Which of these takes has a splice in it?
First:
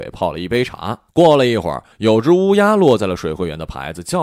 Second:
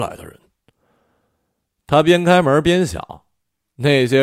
first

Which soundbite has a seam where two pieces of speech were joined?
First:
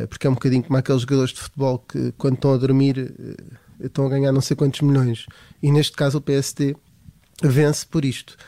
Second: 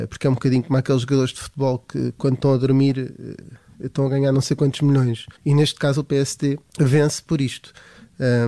second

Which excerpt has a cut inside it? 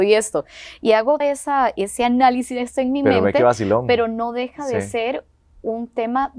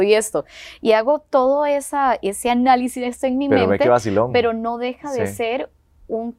first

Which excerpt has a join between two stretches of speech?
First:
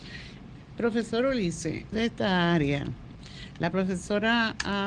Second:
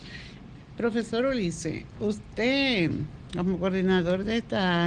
first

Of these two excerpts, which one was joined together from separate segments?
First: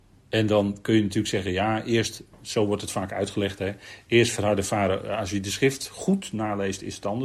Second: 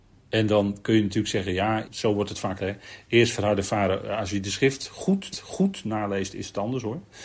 second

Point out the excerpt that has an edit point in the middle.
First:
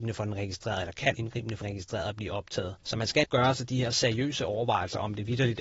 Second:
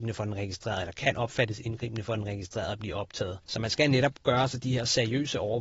first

